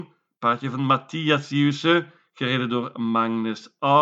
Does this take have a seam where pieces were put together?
no; 0 cuts

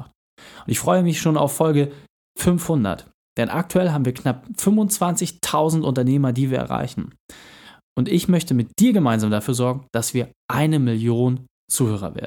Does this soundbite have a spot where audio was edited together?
no; 0 cuts

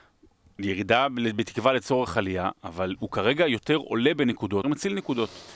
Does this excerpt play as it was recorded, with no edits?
no; 1 cut; at 4.6 s

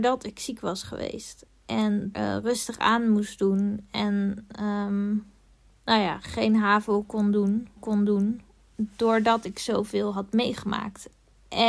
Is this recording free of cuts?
no; 3 cuts; at 2.1 s, 5.4 s, 7.8 s

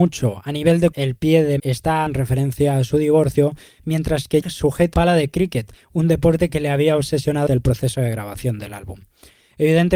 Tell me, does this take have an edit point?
yes; 6 cuts; at 0.9 s, 1.6 s, 2.1 s, 4.4 s, 4.9 s, 7.5 s

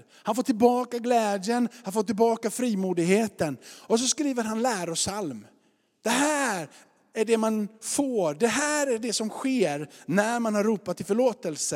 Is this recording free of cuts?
yes; 0 cuts

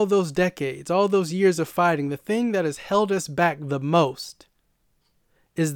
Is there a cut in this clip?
no; 0 cuts

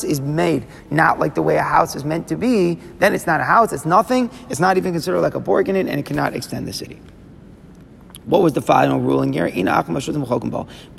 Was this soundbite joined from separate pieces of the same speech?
no; 0 cuts

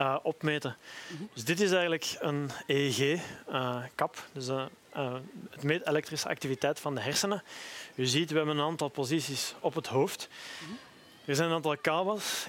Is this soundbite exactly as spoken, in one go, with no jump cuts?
yes; 0 cuts

